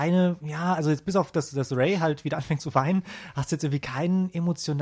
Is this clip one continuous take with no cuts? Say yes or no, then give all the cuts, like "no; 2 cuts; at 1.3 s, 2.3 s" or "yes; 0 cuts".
yes; 0 cuts